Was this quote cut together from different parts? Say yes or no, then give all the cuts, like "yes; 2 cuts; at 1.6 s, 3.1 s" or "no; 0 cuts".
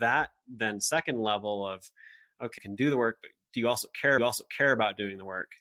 yes; 2 cuts; at 2.6 s, 4.2 s